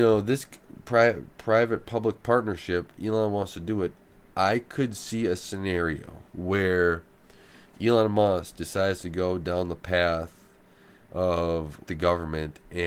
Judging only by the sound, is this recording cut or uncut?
cut